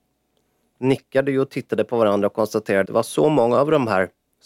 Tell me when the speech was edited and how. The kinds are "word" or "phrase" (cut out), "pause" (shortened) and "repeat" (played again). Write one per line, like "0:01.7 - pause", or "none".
0:02.9 - word

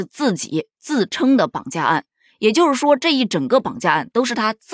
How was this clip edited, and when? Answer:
none

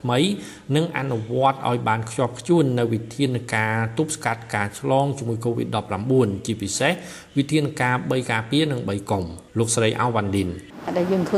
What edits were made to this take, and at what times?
0:09.5 - pause

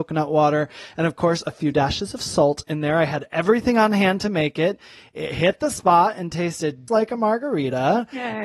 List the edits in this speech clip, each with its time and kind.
0:06.9 - word

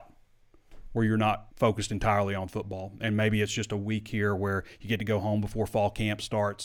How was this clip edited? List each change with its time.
0:01.5 - pause

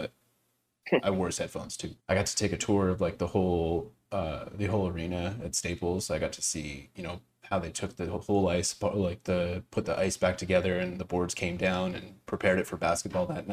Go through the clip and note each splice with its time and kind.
0:02.0 - pause

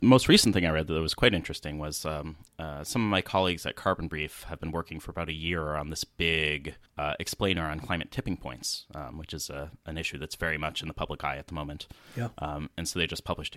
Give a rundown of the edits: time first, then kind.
0:02.5 - pause
0:06.9 - pause

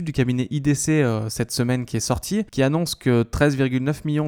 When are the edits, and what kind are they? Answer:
0:02.5 - pause

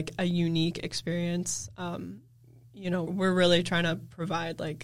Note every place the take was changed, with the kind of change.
0:03.1 - word

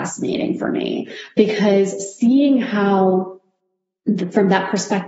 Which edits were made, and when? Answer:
none

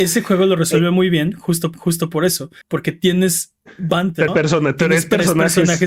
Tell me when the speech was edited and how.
0:01.7 - repeat
0:02.6 - pause
0:04.3 - word

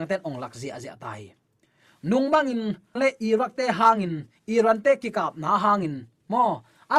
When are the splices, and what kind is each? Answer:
0:03.0 - word

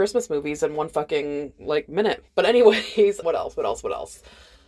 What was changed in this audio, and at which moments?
0:02.3 - pause
0:03.2 - word

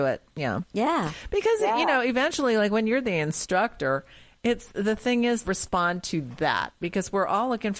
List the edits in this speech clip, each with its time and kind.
0:05.4 - phrase

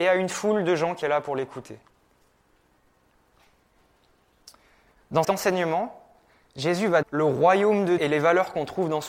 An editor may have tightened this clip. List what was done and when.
0:01.0 - word
0:05.2 - word
0:07.0 - word
0:08.0 - word

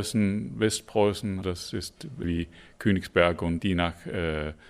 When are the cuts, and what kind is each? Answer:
0:01.4 - word
0:02.2 - word
0:03.6 - word

